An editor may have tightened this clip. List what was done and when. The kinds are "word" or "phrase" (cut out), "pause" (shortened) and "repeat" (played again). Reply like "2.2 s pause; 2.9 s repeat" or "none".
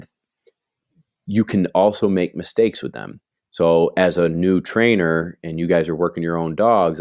none